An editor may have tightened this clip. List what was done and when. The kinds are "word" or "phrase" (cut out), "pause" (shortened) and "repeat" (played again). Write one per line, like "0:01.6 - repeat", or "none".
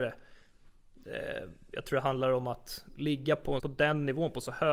0:03.6 - word